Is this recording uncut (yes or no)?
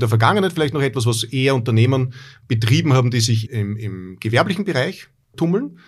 no